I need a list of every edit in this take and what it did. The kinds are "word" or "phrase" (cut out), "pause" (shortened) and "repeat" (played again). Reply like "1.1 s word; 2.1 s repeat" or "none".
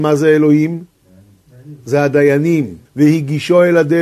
2.9 s pause

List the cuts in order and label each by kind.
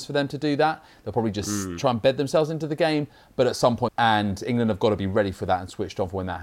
3.9 s phrase

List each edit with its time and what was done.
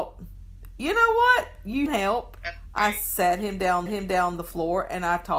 1.9 s phrase; 3.9 s repeat

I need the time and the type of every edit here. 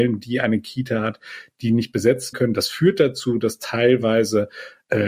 2.3 s word

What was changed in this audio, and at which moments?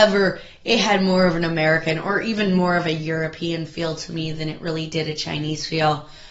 none

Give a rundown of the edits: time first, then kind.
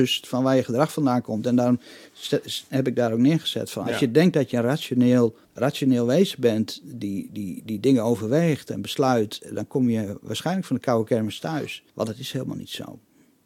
5.4 s pause; 11.9 s pause

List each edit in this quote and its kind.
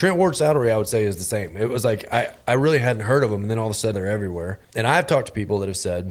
3.9 s word; 4.6 s pause

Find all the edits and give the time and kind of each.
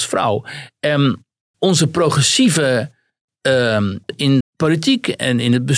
1.5 s word; 4.1 s word; 4.4 s word

